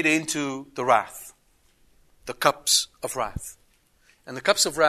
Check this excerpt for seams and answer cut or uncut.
uncut